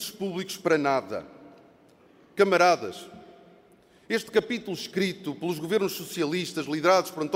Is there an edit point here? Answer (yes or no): no